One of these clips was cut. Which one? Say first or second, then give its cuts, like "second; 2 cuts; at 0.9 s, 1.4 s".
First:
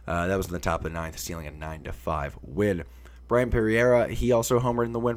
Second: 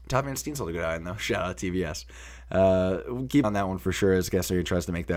second; 2 cuts; at 1.2 s, 3.4 s